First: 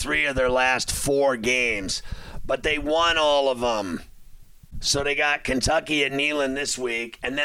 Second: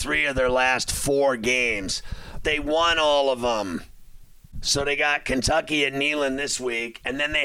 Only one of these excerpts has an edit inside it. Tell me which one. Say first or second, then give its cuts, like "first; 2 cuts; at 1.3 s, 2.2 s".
second; 1 cut; at 2.4 s